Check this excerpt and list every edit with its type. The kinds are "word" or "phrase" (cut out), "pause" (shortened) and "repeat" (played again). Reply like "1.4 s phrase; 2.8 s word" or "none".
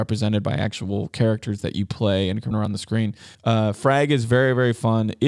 2.5 s word; 3.3 s pause